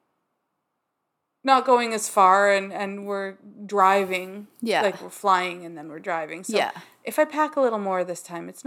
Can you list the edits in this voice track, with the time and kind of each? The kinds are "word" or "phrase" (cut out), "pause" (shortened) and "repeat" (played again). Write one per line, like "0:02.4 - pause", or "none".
none